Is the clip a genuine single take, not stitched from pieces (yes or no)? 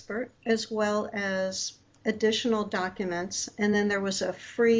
yes